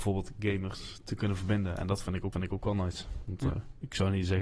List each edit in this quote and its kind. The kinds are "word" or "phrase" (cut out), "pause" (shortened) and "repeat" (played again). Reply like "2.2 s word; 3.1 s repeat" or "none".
2.3 s repeat